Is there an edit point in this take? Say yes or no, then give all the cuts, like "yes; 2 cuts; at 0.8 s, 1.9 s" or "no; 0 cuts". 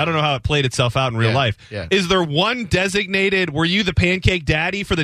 no; 0 cuts